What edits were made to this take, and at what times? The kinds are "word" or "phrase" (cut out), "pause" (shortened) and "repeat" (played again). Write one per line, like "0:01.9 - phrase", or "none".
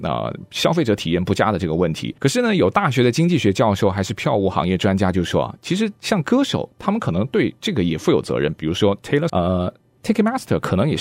0:02.2 - pause
0:09.3 - word

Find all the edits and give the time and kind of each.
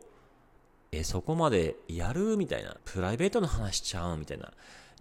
0:02.8 - phrase

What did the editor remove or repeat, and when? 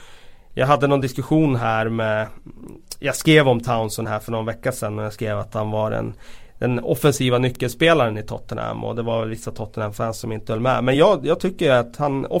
none

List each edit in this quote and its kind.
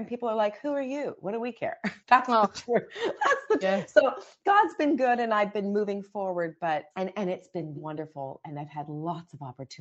0:02.0 - pause
0:03.6 - word
0:06.9 - word
0:07.8 - word

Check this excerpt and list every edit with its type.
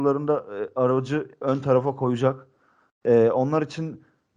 none

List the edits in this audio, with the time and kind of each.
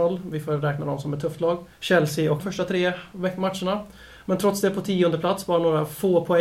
0:01.7 - pause
0:02.4 - phrase

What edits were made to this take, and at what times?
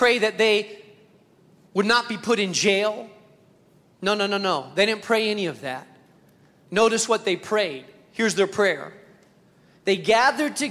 none

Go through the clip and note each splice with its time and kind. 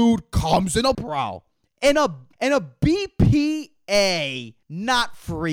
0:00.9 - word
0:02.3 - pause
0:04.6 - pause

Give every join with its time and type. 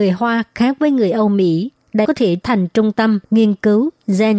0:02.0 - word
0:02.4 - word
0:03.2 - pause

